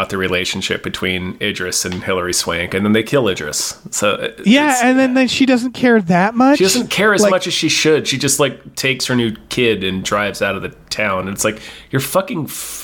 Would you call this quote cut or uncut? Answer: uncut